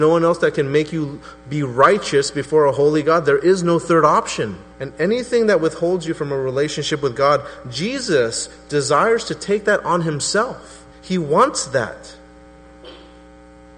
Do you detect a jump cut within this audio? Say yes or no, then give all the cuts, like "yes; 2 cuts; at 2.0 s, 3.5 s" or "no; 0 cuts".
yes; 2 cuts; at 4.7 s, 10.9 s